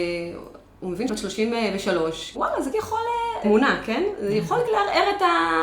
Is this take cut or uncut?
cut